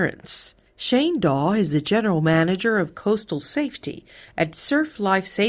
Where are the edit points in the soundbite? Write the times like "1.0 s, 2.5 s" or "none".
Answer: none